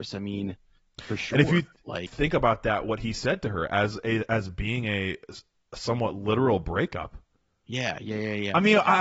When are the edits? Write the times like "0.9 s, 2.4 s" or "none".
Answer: 2.1 s